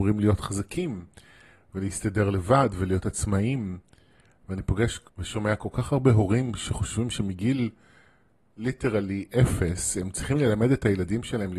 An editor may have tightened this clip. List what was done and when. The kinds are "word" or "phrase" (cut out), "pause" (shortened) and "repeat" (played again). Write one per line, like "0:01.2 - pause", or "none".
0:05.1 - pause